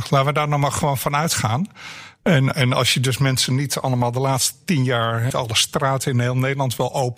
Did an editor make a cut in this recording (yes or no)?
yes